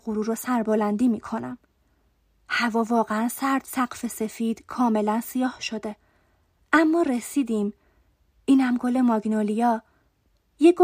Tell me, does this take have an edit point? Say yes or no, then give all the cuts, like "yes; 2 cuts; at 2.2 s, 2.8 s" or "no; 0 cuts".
yes; 1 cut; at 3.6 s